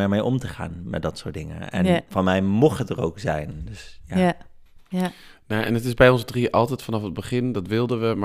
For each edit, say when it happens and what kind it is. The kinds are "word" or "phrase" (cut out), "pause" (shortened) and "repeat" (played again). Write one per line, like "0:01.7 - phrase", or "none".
none